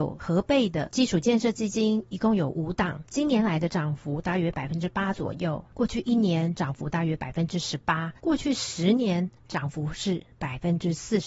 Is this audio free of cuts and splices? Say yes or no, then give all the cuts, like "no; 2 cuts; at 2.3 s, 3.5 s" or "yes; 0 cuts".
no; 1 cut; at 8.2 s